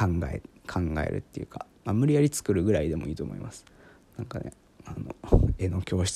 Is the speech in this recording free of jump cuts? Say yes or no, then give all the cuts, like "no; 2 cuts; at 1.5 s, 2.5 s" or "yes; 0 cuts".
yes; 0 cuts